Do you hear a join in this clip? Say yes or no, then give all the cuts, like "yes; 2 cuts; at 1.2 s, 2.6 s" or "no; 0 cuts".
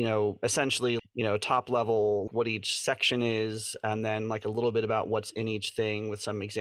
yes; 2 cuts; at 1.0 s, 2.3 s